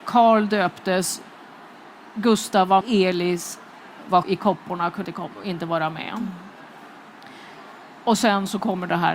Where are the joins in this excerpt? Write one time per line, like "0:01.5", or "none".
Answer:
0:02.8
0:04.2
0:05.0